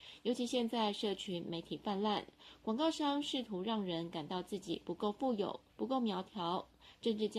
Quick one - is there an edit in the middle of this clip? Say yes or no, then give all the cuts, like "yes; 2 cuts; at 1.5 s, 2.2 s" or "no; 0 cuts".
yes; 1 cut; at 5.7 s